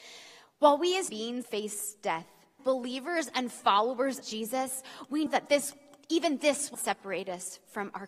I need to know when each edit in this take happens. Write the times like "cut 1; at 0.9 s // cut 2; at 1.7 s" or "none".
cut 1; at 1.1 s // cut 2; at 1.4 s // cut 3; at 2.6 s // cut 4; at 4.2 s // cut 5; at 5.3 s // cut 6; at 6.7 s